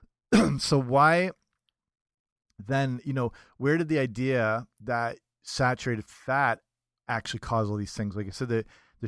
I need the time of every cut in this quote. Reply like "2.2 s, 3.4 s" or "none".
none